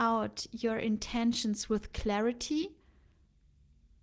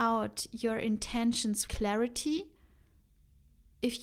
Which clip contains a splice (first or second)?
second